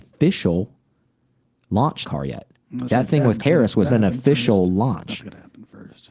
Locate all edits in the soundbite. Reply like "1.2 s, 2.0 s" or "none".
2.0 s, 2.9 s, 3.4 s, 3.9 s

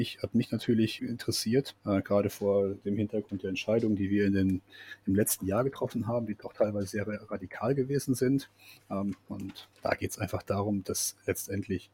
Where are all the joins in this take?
1.0 s, 1.8 s, 9.7 s

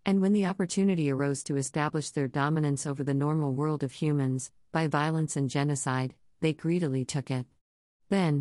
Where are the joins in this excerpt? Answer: none

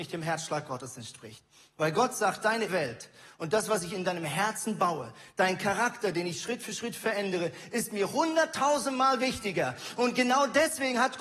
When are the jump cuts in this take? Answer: 2.7 s

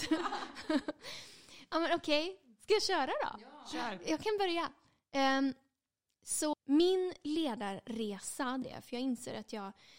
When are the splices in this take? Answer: 6.5 s, 8.6 s

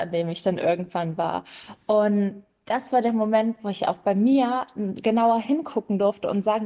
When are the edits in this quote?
none

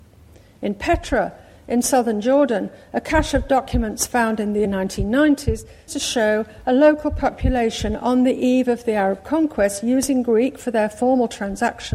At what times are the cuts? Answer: 4.6 s, 5.9 s

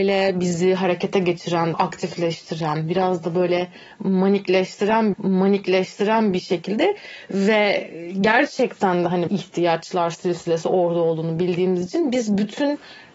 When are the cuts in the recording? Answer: 1.7 s, 5.1 s, 9.3 s

